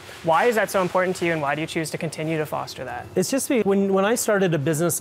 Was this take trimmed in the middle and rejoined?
yes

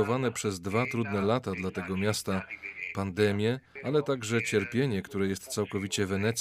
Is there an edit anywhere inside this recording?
no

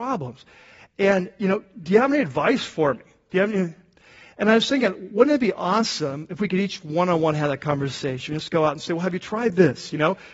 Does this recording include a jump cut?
no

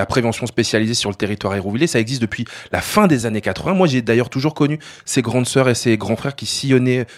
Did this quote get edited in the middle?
no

